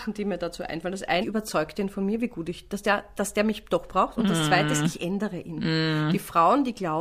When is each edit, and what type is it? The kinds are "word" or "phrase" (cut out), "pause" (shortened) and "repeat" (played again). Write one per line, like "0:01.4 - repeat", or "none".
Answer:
0:01.2 - phrase
0:02.8 - word